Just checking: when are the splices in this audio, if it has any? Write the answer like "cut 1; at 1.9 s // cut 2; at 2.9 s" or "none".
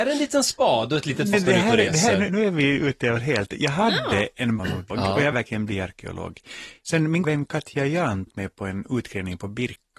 cut 1; at 1.3 s // cut 2; at 2.3 s // cut 3; at 3.2 s // cut 4; at 4.6 s // cut 5; at 4.9 s // cut 6; at 5.3 s // cut 7; at 7.2 s // cut 8; at 8.3 s